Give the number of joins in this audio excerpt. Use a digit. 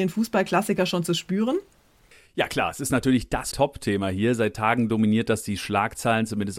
1